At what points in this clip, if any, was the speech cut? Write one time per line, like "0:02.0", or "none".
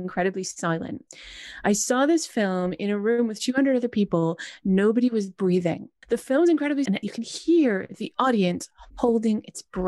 0:06.9
0:08.9